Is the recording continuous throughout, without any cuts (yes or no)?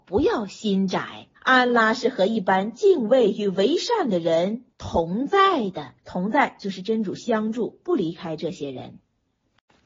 no